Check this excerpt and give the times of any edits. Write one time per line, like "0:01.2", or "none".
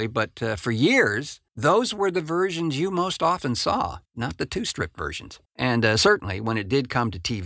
0:01.5
0:04.0
0:05.4